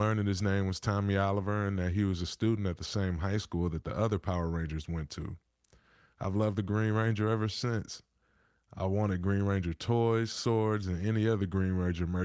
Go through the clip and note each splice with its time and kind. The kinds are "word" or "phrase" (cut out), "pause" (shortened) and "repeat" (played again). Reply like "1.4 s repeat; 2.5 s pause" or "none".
none